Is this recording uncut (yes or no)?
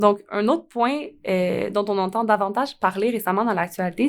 yes